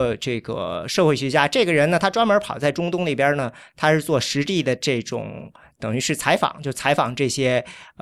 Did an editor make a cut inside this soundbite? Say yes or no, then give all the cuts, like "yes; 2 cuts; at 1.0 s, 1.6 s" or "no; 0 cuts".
no; 0 cuts